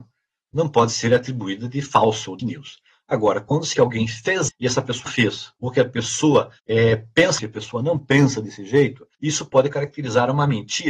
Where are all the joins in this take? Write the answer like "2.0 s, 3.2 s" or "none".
2.4 s, 3.7 s, 4.5 s, 5.1 s, 5.6 s, 6.6 s, 7.4 s, 9.1 s